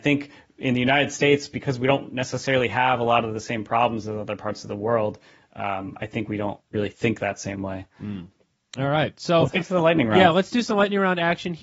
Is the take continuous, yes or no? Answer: yes